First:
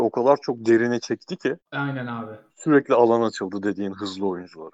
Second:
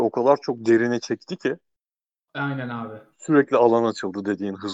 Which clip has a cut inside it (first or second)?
first